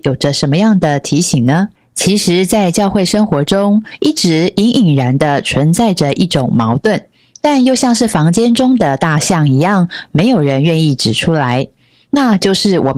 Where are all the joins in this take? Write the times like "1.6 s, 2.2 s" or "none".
1.8 s